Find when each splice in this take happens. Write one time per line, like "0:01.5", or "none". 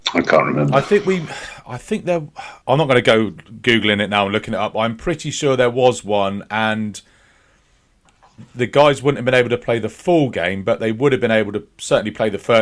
0:02.6